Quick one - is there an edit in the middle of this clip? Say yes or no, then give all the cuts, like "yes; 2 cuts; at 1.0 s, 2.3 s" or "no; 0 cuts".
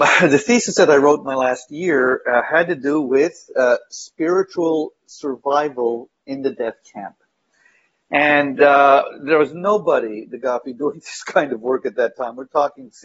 no; 0 cuts